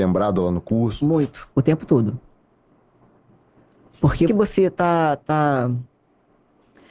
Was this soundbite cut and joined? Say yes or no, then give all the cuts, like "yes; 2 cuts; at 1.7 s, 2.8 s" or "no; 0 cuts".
yes; 2 cuts; at 1.5 s, 4.3 s